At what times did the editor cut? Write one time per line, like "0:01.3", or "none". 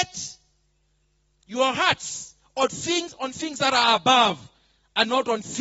none